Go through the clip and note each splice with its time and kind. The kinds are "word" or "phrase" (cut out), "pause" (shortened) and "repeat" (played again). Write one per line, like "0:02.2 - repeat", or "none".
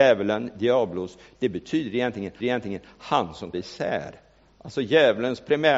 0:02.4 - repeat
0:03.5 - word

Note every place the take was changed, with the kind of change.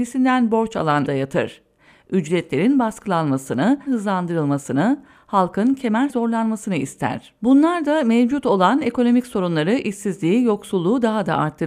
0:01.1 - phrase
0:03.9 - word
0:06.1 - word
0:07.4 - pause

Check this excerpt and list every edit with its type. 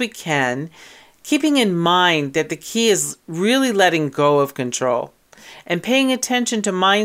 none

